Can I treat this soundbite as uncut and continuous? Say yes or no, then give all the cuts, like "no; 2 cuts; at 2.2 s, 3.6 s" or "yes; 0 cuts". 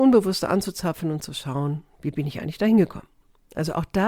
yes; 0 cuts